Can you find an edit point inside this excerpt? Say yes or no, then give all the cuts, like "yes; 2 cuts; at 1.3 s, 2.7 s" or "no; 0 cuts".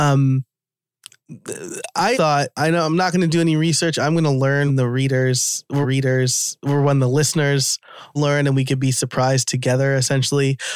yes; 4 cuts; at 2.1 s, 4.7 s, 5.8 s, 8.2 s